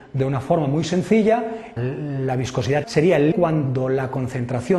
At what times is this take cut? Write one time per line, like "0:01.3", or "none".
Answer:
0:01.8
0:02.8
0:03.3